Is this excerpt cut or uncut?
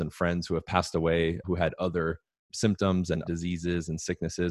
cut